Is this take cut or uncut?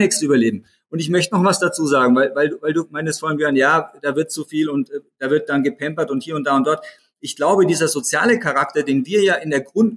uncut